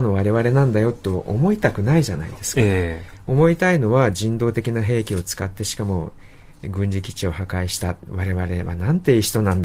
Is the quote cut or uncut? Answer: uncut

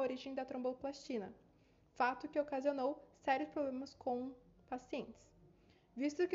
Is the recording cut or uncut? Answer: uncut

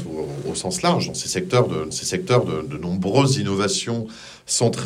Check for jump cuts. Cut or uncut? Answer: cut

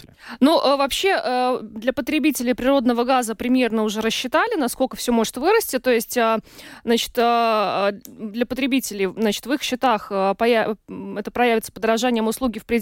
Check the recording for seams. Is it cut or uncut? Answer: uncut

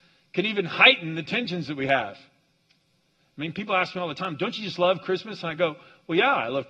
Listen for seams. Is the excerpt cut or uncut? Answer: uncut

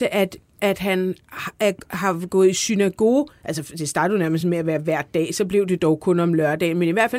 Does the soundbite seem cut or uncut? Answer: uncut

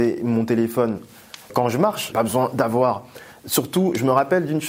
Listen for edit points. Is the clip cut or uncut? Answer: cut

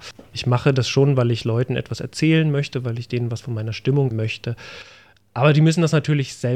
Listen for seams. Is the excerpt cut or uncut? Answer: cut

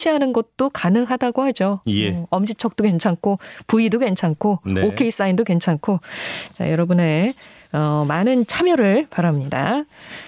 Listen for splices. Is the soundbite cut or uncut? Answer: uncut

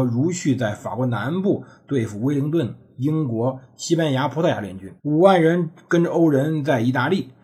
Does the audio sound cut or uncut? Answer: cut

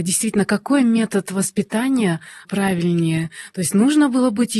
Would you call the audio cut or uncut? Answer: cut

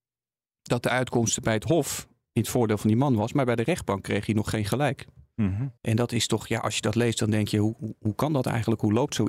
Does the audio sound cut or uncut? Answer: cut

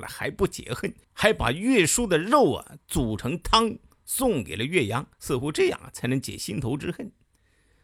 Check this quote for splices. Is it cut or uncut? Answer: cut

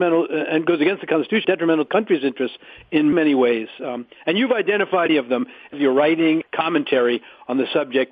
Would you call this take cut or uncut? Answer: cut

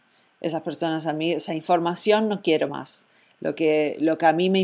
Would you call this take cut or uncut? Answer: uncut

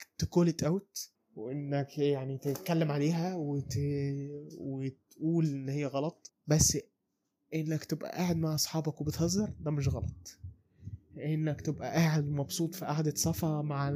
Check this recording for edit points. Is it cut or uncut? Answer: uncut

